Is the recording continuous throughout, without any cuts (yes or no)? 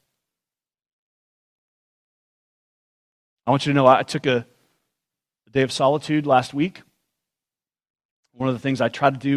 yes